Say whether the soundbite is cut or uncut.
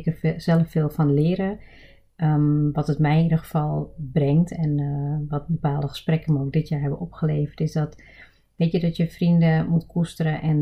uncut